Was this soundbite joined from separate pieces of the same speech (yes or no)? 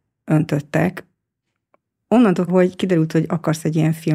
yes